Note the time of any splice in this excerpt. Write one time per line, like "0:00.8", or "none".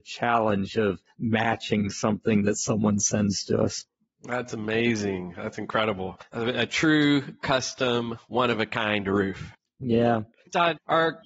none